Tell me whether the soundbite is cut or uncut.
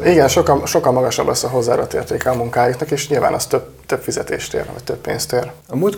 uncut